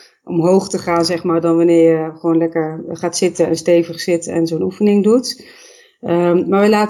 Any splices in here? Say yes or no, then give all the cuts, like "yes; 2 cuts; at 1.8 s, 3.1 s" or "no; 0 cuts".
no; 0 cuts